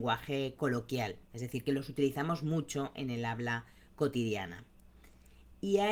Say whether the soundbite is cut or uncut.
uncut